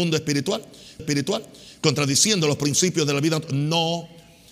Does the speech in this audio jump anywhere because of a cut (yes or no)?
yes